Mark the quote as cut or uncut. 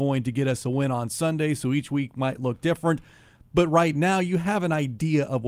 uncut